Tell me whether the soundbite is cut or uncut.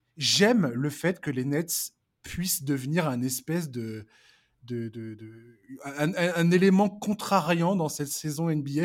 uncut